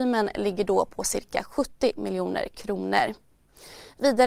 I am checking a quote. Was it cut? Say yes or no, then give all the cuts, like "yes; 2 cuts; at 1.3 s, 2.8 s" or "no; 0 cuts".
no; 0 cuts